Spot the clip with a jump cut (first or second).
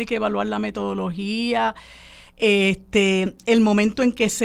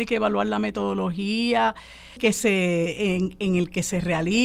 second